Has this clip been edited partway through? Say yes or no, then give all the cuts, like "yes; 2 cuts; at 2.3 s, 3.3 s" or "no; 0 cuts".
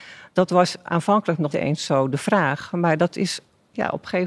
yes; 1 cut; at 1.5 s